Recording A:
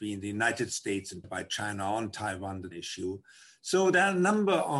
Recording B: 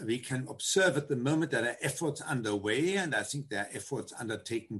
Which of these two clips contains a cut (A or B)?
A